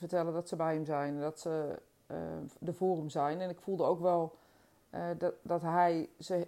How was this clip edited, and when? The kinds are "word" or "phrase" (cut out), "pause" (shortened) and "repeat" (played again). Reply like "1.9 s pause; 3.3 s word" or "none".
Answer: none